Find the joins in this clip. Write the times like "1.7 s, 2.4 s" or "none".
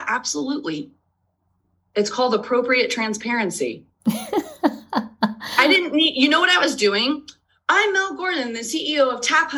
none